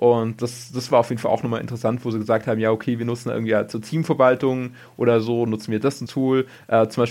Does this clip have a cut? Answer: yes; 1 cut; at 6.1 s

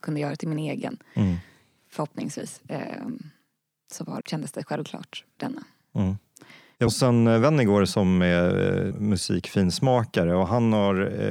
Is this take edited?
yes; 4 cuts; at 4.2 s, 5.4 s, 6.9 s, 8.9 s

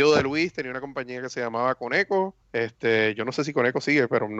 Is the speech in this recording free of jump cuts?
no; 1 cut; at 2.4 s

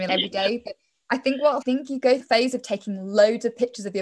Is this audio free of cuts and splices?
no; 2 cuts; at 1.6 s, 2.2 s

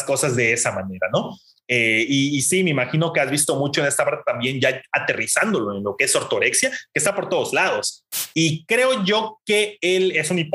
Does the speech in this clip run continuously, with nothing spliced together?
yes; 0 cuts

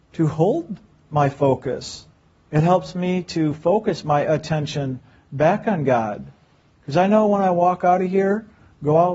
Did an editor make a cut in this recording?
no; 0 cuts

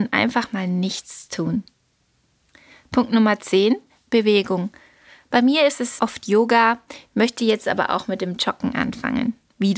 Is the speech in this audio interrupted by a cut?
no; 0 cuts

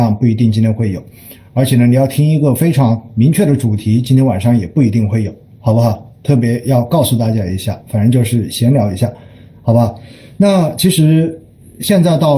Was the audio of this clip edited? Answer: no; 0 cuts

